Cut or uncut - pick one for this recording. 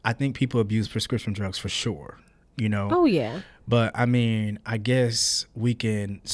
uncut